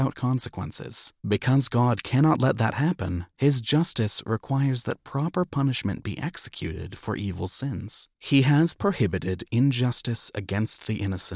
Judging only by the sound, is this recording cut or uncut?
cut